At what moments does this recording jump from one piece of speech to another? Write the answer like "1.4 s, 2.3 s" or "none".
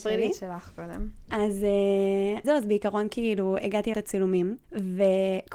2.4 s, 3.9 s, 4.6 s